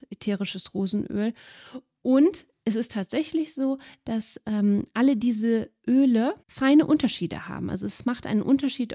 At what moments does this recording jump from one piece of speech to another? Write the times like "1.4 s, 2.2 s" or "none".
6.4 s